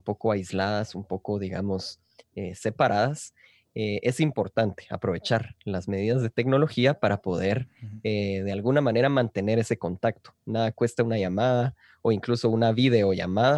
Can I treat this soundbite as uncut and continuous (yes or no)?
yes